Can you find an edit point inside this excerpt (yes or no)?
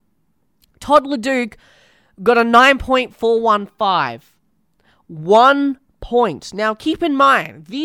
no